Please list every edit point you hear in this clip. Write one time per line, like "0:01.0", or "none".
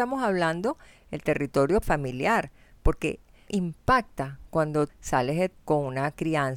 0:01.8
0:03.5
0:04.9
0:05.5

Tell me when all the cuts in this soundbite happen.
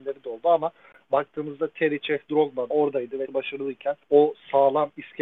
0:02.7
0:03.3
0:04.0

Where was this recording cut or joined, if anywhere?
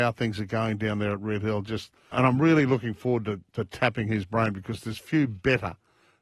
0:02.1

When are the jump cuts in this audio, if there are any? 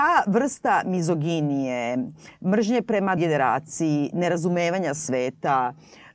0:03.2

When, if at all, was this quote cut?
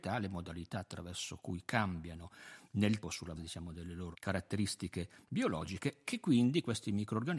0:03.0
0:03.4
0:04.1
0:06.0

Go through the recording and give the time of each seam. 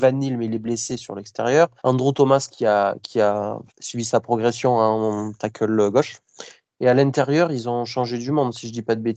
0:01.8
0:03.7

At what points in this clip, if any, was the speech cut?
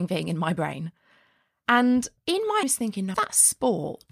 0:02.2
0:02.6
0:03.1

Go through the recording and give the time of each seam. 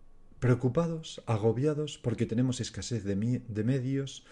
none

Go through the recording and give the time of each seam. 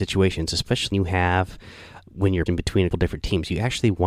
0:00.9
0:02.5
0:02.9

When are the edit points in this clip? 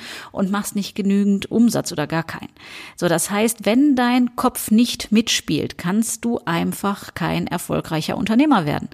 none

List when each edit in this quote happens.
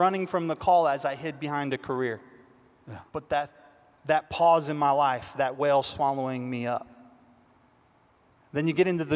0:03.1

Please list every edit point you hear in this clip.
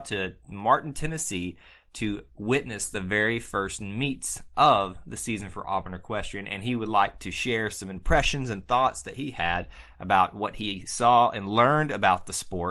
none

